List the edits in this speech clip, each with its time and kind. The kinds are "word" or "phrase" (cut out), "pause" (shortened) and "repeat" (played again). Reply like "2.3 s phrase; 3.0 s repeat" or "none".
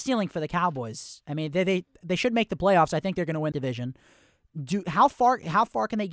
3.5 s word

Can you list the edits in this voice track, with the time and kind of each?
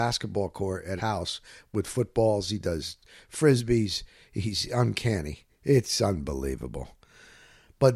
1.0 s word

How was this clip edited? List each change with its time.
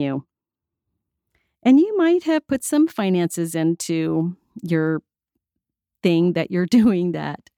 none

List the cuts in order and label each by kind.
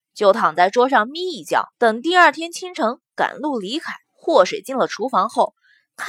1.7 s pause; 4.0 s pause

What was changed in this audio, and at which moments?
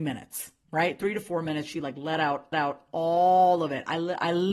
2.5 s repeat

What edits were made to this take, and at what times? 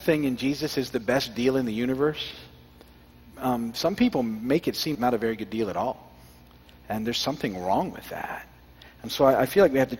4.9 s word

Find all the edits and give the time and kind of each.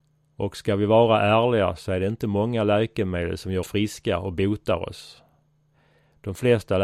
3.6 s word

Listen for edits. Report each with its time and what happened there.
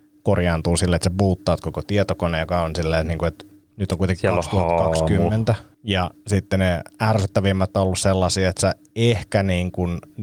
3.6 s pause; 5.7 s pause

